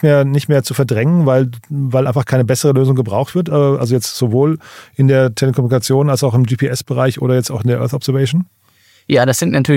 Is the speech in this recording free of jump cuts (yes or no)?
yes